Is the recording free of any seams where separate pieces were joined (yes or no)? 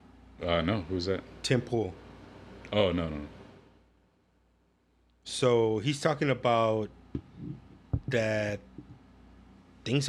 yes